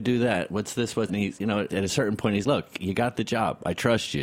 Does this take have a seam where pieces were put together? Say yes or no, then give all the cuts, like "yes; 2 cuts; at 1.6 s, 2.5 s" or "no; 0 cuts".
yes; 3 cuts; at 1.1 s, 1.7 s, 2.4 s